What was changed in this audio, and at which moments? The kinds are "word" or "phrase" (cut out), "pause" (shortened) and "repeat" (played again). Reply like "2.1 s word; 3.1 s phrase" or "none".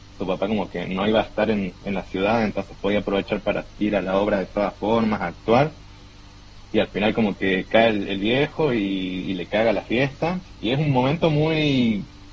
none